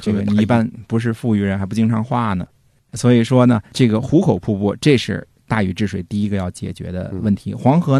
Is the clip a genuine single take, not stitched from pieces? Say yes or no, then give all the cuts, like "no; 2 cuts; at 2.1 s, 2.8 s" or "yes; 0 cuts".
yes; 0 cuts